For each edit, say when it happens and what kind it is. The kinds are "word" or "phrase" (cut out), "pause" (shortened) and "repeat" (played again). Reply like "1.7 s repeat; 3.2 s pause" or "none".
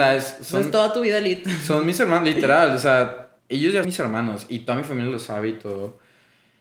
3.4 s pause; 3.8 s word